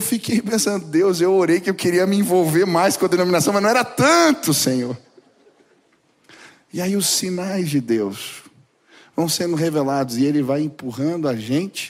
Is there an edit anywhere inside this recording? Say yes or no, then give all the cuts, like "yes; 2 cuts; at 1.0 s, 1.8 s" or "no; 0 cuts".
no; 0 cuts